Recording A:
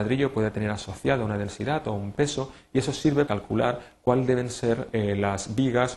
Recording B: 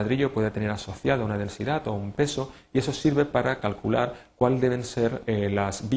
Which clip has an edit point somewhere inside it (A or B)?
A